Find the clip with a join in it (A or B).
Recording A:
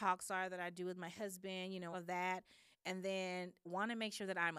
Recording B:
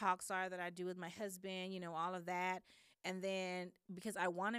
A